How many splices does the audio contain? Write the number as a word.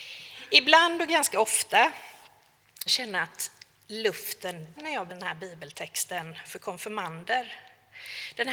three